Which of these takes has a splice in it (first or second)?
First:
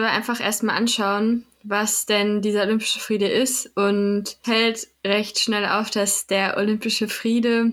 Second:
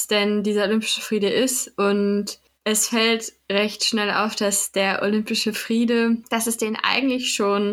first